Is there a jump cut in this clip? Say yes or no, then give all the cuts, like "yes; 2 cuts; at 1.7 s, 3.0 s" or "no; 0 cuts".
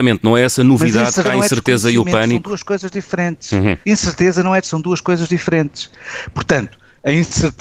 yes; 3 cuts; at 1.2 s, 3.8 s, 4.6 s